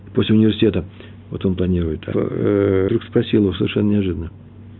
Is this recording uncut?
no; 2 cuts; at 2.1 s, 2.9 s

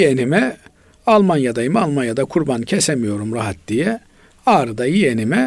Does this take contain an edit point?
no; 0 cuts

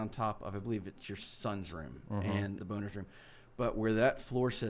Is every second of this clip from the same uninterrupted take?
no; 1 cut; at 2.6 s

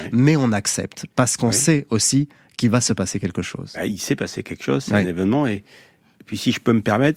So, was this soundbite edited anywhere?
no; 0 cuts

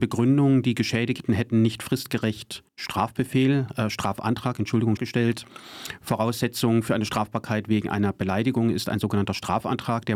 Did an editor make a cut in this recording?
yes; 2 cuts; at 2.7 s, 5.0 s

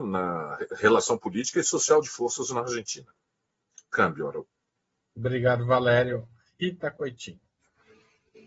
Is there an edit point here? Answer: no; 0 cuts

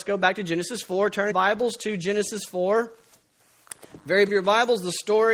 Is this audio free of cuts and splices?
no; 2 cuts; at 1.3 s, 4.3 s

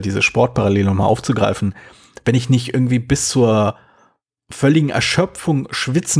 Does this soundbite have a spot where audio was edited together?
no; 0 cuts

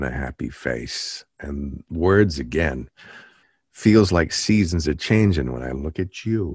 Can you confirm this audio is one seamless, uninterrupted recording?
yes; 0 cuts

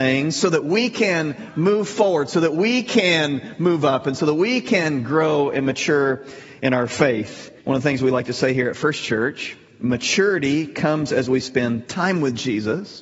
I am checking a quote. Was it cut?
yes; 1 cut; at 7.6 s

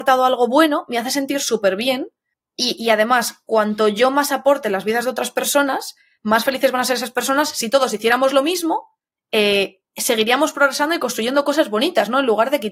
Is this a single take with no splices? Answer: yes; 0 cuts

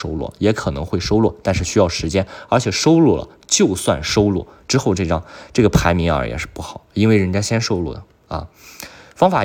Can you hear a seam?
yes; 1 cut; at 6.9 s

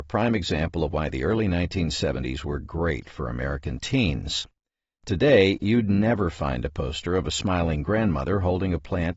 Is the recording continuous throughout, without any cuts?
yes; 0 cuts

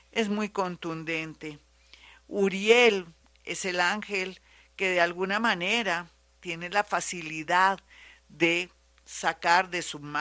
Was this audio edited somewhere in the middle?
no; 0 cuts

